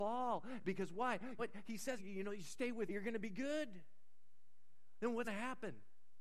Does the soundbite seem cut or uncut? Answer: cut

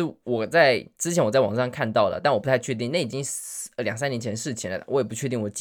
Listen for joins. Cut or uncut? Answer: uncut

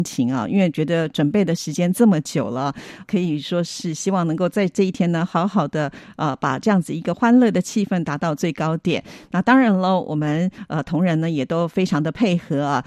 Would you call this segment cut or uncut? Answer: cut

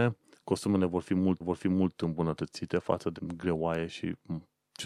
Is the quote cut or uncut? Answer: cut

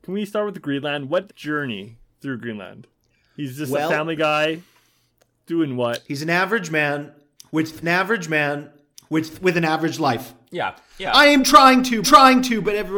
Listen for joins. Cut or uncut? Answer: cut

